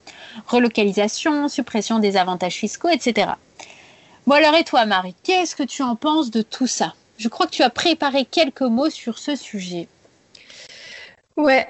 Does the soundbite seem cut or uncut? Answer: uncut